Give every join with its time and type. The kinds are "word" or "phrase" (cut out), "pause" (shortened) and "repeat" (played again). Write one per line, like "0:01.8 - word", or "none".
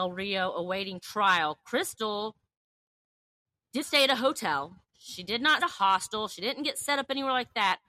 0:03.8 - word
0:04.9 - pause
0:05.6 - phrase